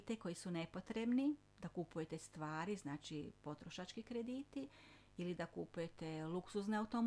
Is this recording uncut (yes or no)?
yes